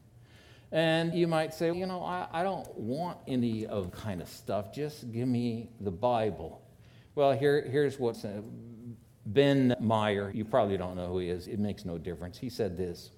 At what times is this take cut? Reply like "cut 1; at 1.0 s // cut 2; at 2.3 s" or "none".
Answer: cut 1; at 1.1 s // cut 2; at 1.7 s // cut 3; at 3.9 s // cut 4; at 8.1 s // cut 5; at 9.7 s // cut 6; at 10.3 s // cut 7; at 11.5 s